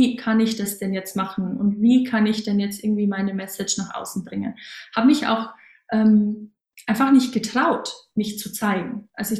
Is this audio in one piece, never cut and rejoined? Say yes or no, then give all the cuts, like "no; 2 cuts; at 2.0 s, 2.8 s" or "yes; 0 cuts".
yes; 0 cuts